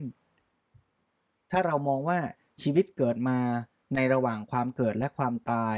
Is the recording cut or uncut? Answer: uncut